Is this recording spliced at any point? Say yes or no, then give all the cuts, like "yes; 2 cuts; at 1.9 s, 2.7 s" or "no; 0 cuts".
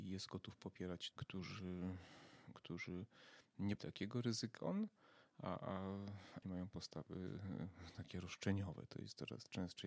yes; 4 cuts; at 1.1 s, 3.8 s, 4.6 s, 6.4 s